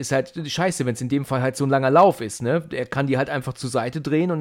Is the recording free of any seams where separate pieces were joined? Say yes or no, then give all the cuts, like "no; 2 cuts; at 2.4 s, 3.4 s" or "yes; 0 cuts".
yes; 0 cuts